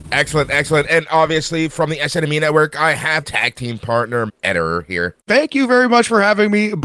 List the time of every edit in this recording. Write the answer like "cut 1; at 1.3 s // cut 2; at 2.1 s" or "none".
cut 1; at 3.2 s // cut 2; at 4.3 s // cut 3; at 5.2 s